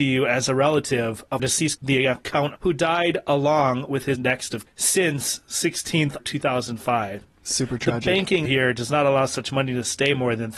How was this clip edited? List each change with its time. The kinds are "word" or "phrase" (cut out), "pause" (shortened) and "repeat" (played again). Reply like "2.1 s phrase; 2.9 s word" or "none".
1.4 s word; 1.8 s word; 2.6 s word; 4.2 s word; 4.7 s word; 6.2 s word; 8.5 s word